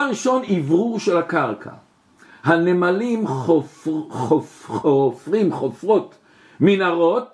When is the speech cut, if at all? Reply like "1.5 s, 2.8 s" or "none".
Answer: none